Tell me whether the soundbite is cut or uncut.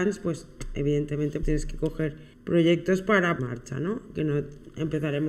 cut